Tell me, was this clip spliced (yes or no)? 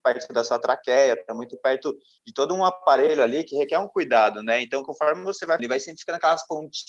yes